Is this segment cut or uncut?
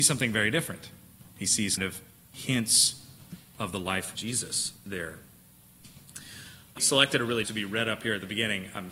cut